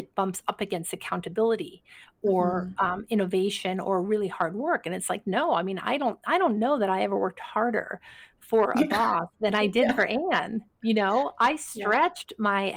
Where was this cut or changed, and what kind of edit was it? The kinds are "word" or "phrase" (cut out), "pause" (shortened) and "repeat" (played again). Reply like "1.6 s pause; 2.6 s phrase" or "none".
none